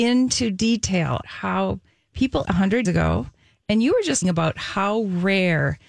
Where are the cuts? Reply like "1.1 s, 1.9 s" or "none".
1.2 s, 2.4 s, 2.8 s, 4.2 s